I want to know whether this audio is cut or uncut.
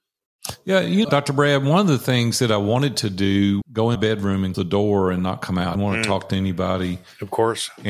cut